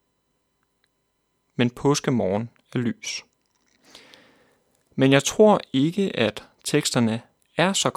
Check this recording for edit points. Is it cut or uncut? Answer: uncut